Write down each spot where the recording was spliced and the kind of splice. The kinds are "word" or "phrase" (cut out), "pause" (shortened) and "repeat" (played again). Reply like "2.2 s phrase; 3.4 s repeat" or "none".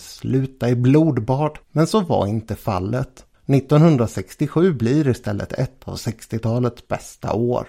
1.6 s pause; 3.3 s pause